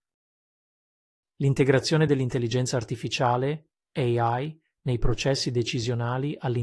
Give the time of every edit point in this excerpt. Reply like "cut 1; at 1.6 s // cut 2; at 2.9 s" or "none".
none